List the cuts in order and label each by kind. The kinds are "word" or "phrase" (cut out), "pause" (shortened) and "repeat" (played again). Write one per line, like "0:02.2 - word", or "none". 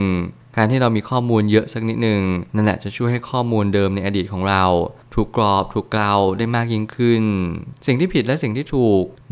0:02.5 - pause